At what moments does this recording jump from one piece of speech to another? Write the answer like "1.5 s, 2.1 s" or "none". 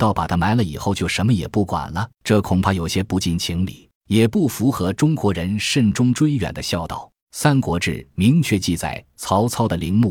2.1 s, 4.0 s, 7.2 s

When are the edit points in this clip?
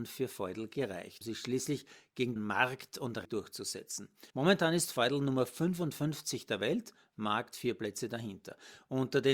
1.2 s, 2.4 s, 3.2 s, 4.3 s

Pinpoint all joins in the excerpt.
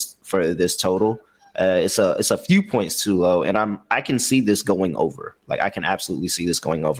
none

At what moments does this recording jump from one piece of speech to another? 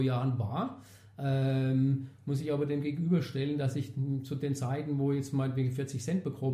none

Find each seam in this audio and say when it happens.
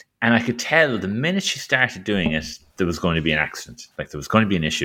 none

